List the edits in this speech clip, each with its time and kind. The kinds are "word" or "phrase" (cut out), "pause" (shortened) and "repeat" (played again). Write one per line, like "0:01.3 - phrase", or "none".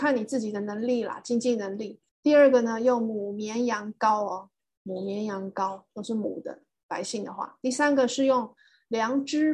0:02.1 - pause